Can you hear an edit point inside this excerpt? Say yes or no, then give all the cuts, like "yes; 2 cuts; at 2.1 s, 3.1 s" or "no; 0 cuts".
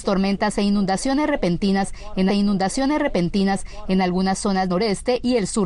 yes; 2 cuts; at 2.3 s, 4.7 s